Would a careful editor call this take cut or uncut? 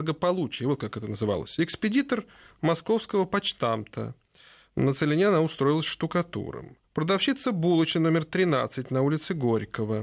cut